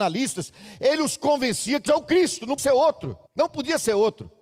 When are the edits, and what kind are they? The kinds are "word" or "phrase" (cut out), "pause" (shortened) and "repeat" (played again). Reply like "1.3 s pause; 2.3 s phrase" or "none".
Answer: 1.9 s word; 2.6 s word; 3.3 s pause